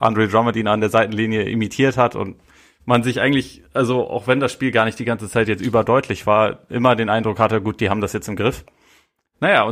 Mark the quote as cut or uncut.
uncut